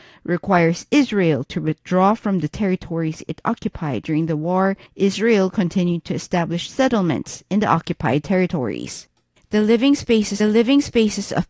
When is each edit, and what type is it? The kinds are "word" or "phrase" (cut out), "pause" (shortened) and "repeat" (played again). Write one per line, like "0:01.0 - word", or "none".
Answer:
0:04.9 - pause
0:10.4 - repeat